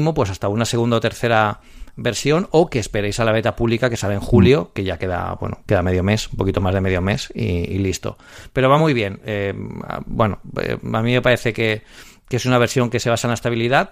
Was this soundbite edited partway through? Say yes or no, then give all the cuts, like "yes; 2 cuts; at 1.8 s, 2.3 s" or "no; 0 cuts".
no; 0 cuts